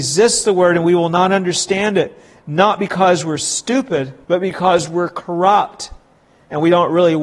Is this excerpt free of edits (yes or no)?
no